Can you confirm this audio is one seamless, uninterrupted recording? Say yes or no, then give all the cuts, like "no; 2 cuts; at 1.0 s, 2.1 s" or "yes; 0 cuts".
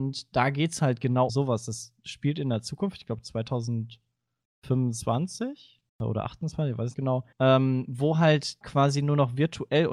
no; 5 cuts; at 1.3 s, 5.9 s, 6.9 s, 7.3 s, 8.6 s